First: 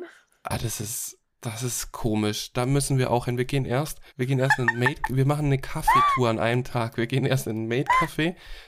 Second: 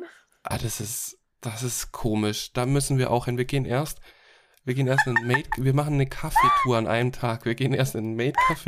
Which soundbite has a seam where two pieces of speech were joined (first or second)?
first